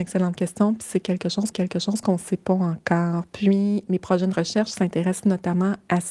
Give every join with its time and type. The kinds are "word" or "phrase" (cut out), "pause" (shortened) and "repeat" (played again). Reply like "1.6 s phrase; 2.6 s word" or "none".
1.5 s repeat